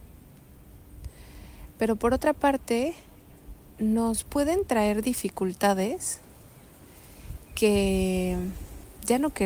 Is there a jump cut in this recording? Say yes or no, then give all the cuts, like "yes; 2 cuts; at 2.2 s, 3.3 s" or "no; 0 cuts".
no; 0 cuts